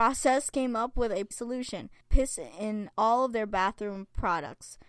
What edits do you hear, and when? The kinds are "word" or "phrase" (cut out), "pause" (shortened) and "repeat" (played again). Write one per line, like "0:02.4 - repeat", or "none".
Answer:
0:01.3 - word
0:02.0 - pause
0:02.9 - pause

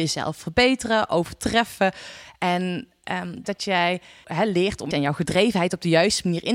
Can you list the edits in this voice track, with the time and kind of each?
0:03.4 - phrase
0:04.2 - word
0:04.9 - phrase

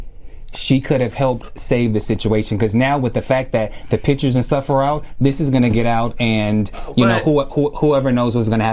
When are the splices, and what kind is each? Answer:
none

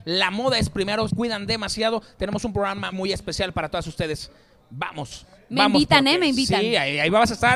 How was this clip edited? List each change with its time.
0:01.1 - word
0:02.9 - word

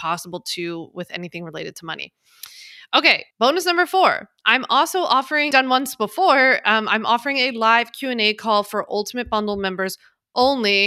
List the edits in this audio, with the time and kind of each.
0:03.3 - pause
0:05.5 - phrase

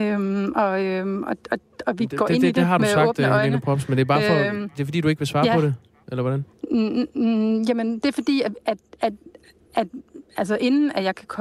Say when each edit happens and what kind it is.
none

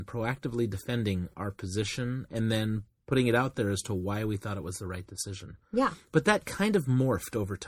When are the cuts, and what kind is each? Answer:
none

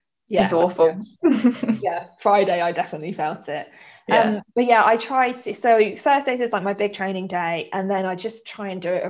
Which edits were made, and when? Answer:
0:04.5 - pause

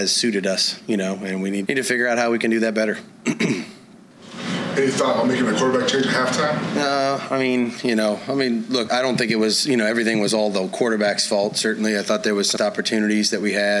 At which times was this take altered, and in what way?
0:01.7 - word
0:08.9 - word
0:12.6 - word

